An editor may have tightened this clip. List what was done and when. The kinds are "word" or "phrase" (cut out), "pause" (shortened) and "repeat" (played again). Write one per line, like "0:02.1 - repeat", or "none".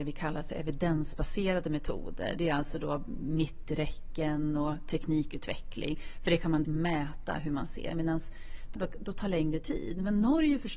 0:06.6 - word
0:08.8 - phrase